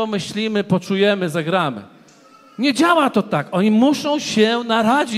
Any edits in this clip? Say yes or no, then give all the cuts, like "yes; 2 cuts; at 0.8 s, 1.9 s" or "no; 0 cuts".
no; 0 cuts